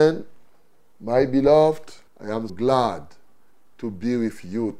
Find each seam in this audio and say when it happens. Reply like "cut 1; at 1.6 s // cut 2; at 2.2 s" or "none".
cut 1; at 2.1 s // cut 2; at 2.5 s